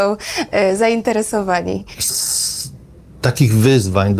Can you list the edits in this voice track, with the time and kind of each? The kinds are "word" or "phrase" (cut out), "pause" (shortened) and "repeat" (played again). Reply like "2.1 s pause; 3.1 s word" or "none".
2.1 s phrase